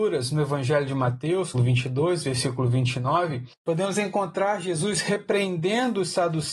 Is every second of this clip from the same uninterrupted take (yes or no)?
no